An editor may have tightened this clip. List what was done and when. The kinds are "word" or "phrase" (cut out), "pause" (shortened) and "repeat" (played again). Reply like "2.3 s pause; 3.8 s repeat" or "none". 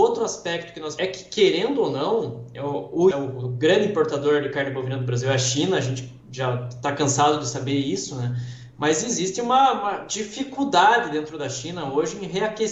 1.0 s phrase; 3.1 s word